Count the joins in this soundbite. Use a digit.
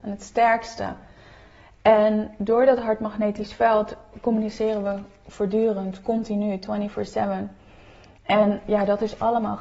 0